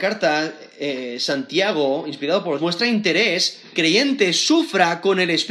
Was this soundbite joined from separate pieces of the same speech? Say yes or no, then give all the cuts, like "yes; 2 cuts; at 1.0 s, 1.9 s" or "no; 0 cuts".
yes; 2 cuts; at 2.6 s, 3.8 s